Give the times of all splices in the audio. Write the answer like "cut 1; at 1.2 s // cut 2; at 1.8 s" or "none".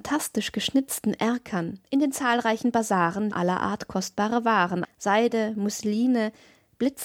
cut 1; at 1.9 s // cut 2; at 3.3 s // cut 3; at 4.8 s